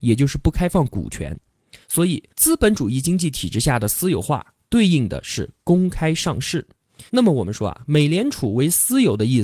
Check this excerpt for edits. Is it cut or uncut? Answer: cut